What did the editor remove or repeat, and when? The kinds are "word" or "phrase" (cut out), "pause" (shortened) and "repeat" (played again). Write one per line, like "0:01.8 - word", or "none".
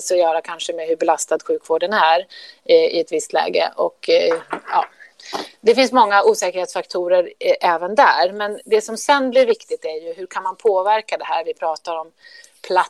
none